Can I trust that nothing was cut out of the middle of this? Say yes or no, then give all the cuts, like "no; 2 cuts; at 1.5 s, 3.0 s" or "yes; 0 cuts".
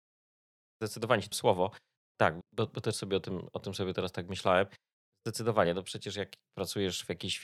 no; 2 cuts; at 1.3 s, 2.4 s